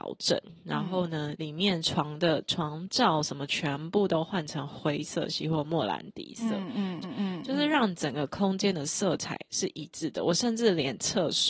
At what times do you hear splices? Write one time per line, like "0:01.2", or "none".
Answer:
0:01.3
0:07.0